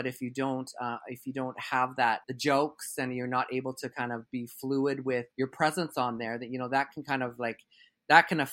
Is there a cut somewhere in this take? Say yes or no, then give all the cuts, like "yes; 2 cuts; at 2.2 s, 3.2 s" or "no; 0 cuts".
yes; 2 cuts; at 2.2 s, 5.3 s